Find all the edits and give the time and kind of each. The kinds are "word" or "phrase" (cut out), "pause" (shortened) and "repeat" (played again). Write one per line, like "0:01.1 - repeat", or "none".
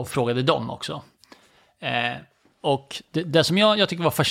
none